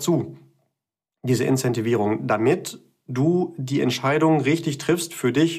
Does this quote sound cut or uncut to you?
uncut